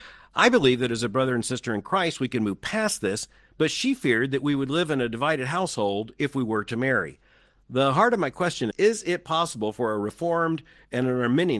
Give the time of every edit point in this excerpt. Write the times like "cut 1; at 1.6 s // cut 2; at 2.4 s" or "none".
cut 1; at 8.7 s